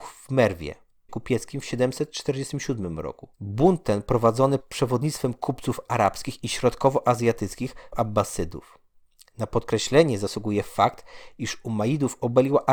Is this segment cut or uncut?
cut